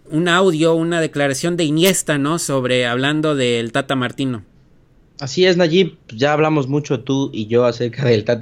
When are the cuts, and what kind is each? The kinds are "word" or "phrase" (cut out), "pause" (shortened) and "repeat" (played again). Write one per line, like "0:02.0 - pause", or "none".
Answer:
none